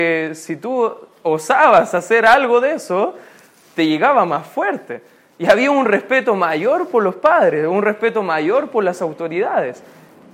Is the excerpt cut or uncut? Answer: uncut